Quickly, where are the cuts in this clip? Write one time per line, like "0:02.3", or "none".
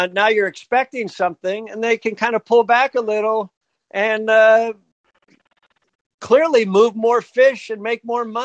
none